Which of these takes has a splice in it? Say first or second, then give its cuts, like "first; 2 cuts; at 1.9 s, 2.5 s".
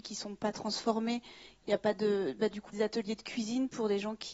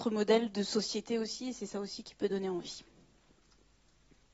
first; 1 cut; at 2.7 s